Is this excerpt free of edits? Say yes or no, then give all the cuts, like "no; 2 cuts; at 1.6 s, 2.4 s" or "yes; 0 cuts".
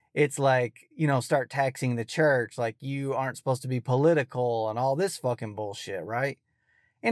yes; 0 cuts